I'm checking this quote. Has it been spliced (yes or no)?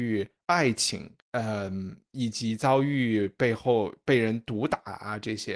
yes